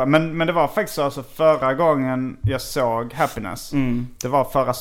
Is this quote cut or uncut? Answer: uncut